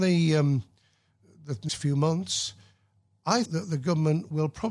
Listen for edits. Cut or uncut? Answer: cut